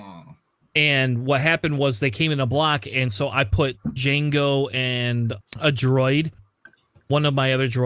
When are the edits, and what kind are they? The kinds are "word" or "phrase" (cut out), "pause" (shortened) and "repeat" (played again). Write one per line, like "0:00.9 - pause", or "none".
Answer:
0:05.4 - word